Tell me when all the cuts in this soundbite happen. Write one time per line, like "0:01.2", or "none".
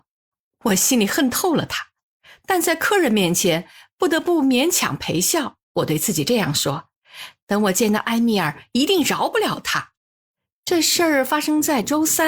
0:05.6
0:10.0